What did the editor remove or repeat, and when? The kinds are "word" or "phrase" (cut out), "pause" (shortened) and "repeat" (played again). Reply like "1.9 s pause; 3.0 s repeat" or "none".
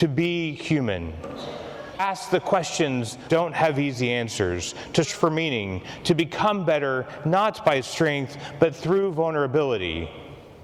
2.0 s word; 3.3 s word; 5.0 s word